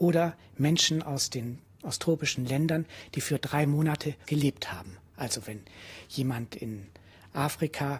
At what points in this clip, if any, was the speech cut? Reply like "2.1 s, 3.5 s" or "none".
4.2 s